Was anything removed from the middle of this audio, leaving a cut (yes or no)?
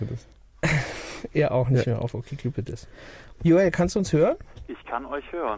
no